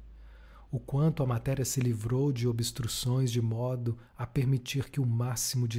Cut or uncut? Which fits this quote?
cut